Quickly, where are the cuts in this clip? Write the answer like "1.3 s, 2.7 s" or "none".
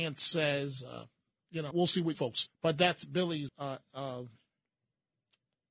1.7 s, 2.1 s, 2.5 s, 3.5 s